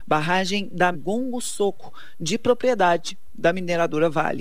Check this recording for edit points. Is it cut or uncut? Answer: cut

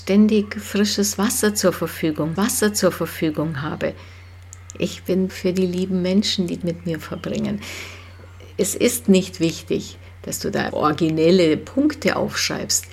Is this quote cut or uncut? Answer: cut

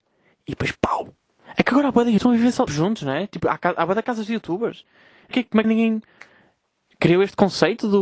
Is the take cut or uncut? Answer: cut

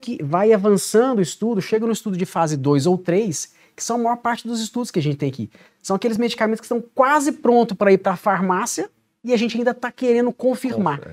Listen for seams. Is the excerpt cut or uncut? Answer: uncut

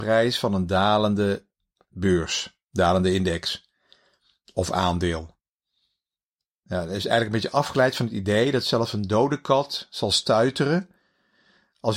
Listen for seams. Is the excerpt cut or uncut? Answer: uncut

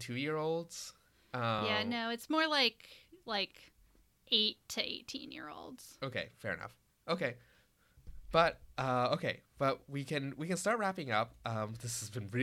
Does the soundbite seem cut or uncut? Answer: uncut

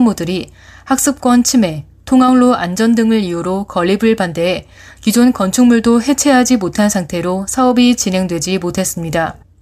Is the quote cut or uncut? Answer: uncut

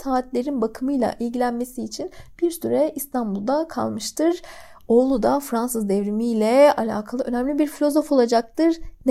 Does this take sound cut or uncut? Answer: uncut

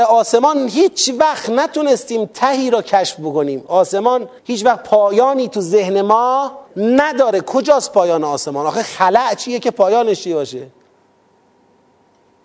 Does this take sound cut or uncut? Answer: cut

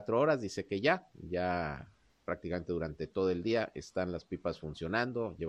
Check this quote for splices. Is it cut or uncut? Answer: uncut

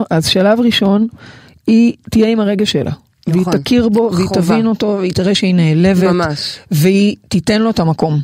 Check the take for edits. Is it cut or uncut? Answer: uncut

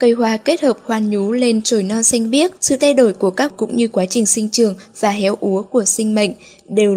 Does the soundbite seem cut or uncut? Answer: cut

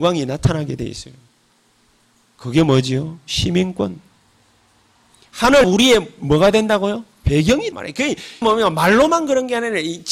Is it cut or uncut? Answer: cut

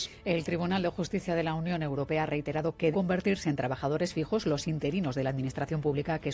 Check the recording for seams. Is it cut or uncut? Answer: cut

